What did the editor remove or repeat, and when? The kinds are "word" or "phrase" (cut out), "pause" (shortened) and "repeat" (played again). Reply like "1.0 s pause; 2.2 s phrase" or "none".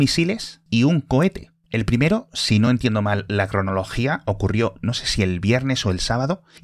none